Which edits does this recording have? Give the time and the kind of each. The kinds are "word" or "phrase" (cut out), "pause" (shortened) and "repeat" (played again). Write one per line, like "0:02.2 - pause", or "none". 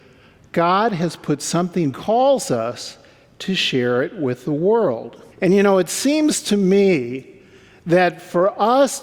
0:01.9 - phrase
0:05.3 - pause